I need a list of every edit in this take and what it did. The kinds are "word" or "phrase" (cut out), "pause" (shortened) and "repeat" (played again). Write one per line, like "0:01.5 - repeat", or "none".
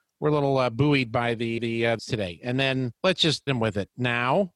0:01.6 - repeat
0:02.0 - word
0:03.0 - pause
0:03.5 - word